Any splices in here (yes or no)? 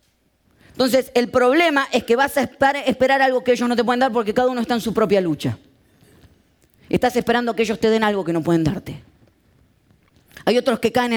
no